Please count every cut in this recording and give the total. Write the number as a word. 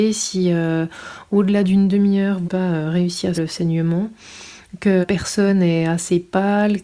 three